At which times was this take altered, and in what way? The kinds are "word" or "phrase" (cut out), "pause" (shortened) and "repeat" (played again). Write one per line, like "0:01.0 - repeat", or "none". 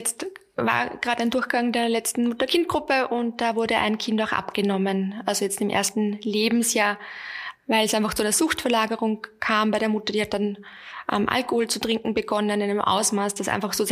none